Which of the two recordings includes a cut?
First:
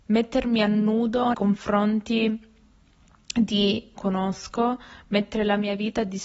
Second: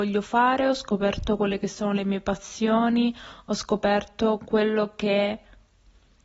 first; 2 cuts; at 1.3 s, 4.0 s

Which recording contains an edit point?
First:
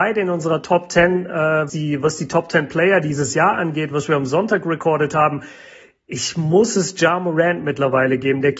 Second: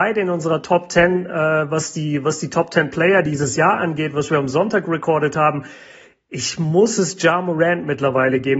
first; 1 cut; at 1.7 s

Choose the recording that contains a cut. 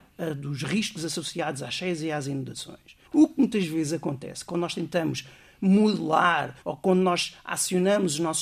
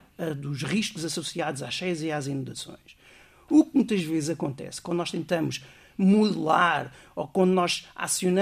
first; 2 cuts; at 3.0 s, 6.6 s

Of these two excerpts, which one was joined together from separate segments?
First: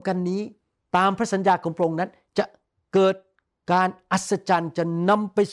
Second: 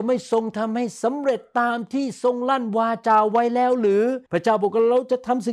second; 1 cut; at 4.3 s

